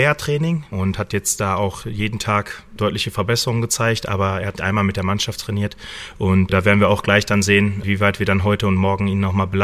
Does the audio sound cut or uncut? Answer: cut